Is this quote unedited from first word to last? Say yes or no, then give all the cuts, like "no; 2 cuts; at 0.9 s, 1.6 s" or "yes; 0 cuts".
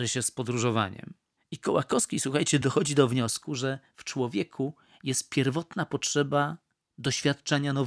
yes; 0 cuts